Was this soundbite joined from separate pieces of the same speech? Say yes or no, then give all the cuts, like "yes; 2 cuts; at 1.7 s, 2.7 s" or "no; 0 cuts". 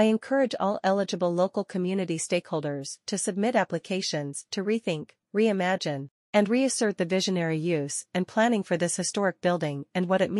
no; 0 cuts